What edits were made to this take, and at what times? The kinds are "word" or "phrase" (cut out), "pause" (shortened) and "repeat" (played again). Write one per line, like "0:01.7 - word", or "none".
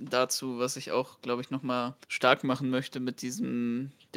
0:02.0 - pause